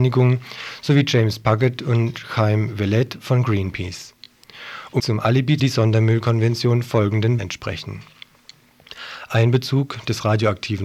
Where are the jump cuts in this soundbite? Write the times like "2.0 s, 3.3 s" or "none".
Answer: 5.0 s, 5.6 s, 7.4 s